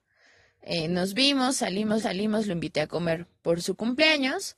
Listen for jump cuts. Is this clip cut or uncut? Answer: cut